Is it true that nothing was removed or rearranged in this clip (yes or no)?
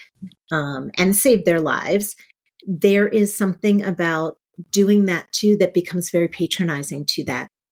yes